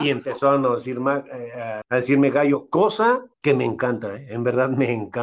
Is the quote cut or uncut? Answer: cut